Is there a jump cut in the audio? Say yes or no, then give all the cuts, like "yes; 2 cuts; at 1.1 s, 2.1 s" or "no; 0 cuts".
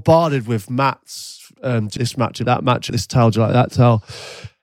yes; 3 cuts; at 2.0 s, 2.4 s, 2.9 s